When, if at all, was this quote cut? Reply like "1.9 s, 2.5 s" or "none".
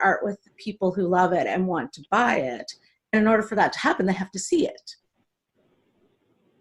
none